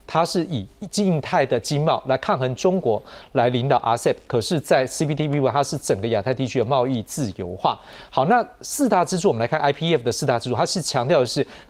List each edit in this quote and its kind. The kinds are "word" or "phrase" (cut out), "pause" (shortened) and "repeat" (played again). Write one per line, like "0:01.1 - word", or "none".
none